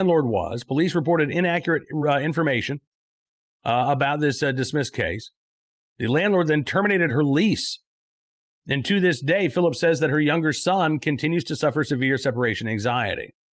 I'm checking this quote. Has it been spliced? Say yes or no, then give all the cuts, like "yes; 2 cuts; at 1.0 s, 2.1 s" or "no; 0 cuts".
no; 0 cuts